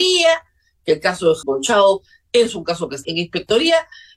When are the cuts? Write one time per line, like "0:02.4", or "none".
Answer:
0:01.4
0:03.0